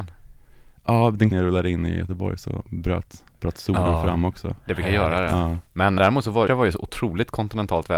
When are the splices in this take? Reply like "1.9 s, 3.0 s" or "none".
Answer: 1.3 s, 5.7 s, 6.0 s, 6.5 s